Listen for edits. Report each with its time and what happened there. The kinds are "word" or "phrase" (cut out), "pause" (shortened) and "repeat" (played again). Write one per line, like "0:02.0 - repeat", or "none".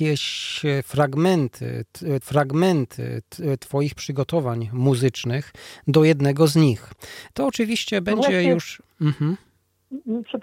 0:02.2 - repeat